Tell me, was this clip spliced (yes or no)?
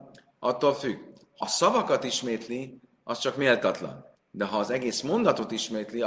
yes